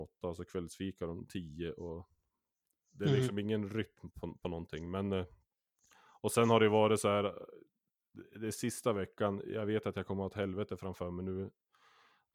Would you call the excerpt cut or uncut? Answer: uncut